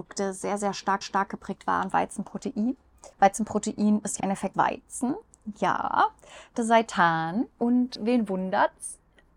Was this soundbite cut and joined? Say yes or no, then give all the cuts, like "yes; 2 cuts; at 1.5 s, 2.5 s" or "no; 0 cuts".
yes; 7 cuts; at 1.0 s, 1.9 s, 3.1 s, 4.2 s, 4.5 s, 6.6 s, 7.5 s